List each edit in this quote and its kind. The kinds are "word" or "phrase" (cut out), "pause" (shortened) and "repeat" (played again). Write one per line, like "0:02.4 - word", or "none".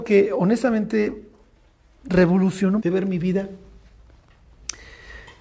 0:02.8 - phrase